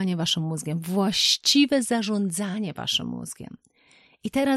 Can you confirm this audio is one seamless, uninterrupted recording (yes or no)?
yes